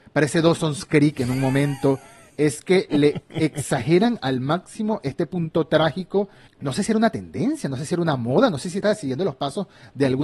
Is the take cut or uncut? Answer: cut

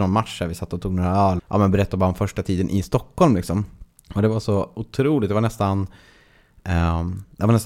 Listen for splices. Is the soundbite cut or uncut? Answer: cut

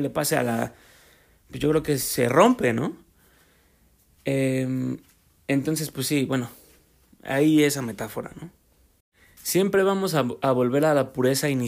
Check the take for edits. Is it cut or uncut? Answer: uncut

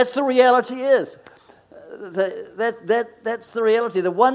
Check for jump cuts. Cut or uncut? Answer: uncut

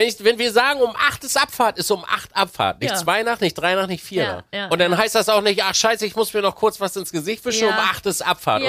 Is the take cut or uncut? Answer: uncut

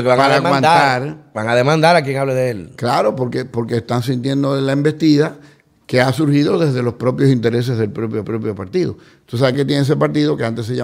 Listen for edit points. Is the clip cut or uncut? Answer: cut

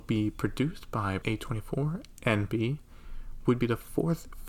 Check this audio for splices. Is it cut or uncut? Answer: cut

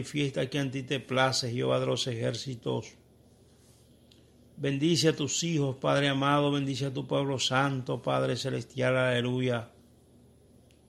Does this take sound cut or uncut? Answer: uncut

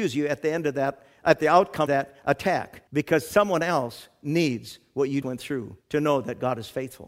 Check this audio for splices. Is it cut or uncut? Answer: cut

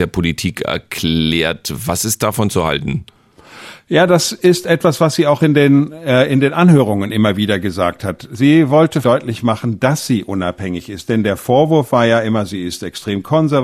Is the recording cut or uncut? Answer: cut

